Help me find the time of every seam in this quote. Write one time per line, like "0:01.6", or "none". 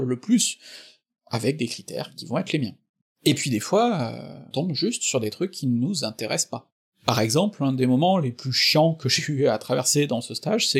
0:04.5

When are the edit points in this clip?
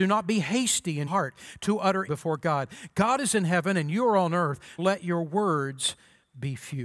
0:01.1
0:02.1
0:04.8

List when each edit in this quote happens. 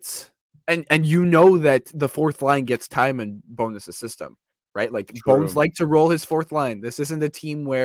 none

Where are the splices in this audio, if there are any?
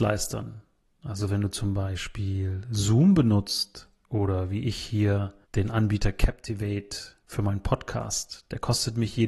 0:05.4
0:07.2

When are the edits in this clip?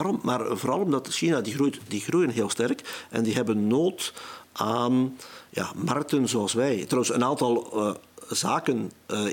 none

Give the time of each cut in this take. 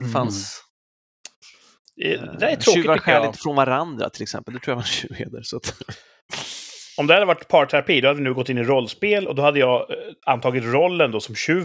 none

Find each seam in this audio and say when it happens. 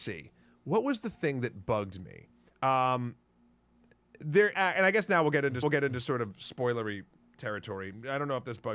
0:02.5
0:04.5
0:05.6

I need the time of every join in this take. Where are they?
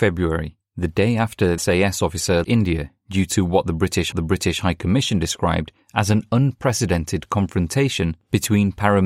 0:01.6
0:02.4
0:04.1

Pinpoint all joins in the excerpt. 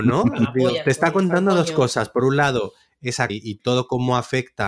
0:03.3

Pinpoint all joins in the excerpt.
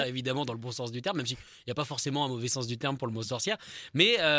none

